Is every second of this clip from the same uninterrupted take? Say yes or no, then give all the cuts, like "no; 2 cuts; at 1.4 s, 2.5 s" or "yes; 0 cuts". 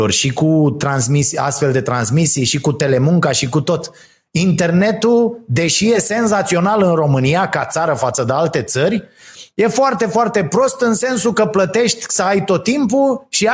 yes; 0 cuts